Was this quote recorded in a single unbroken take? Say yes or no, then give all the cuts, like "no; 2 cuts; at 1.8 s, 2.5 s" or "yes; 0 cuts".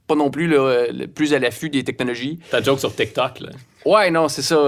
yes; 0 cuts